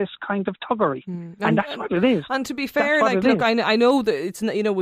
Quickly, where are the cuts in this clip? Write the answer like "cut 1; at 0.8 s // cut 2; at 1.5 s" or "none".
none